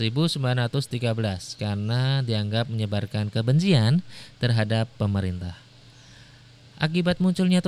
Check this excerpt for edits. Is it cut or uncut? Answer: uncut